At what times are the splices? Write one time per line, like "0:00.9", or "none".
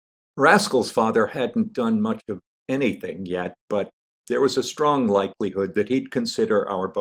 none